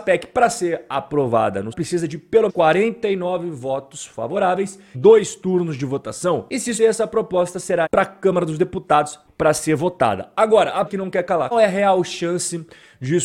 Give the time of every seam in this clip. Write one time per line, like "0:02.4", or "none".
0:01.7
0:02.5
0:04.9
0:06.8
0:07.9
0:09.3
0:10.9
0:11.5